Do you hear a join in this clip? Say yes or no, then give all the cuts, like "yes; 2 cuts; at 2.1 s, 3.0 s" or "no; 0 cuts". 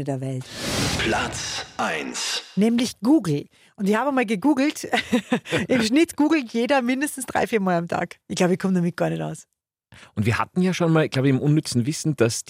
yes; 1 cut; at 8.2 s